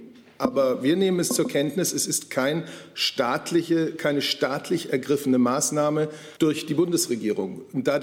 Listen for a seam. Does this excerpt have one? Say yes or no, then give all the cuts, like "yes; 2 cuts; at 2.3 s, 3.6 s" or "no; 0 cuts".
yes; 1 cut; at 6.4 s